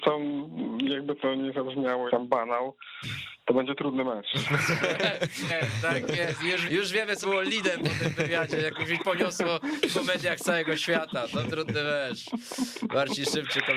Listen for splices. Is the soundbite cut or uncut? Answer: cut